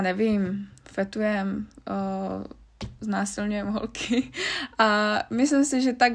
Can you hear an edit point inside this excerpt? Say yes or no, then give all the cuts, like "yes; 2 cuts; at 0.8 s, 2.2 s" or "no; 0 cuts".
no; 0 cuts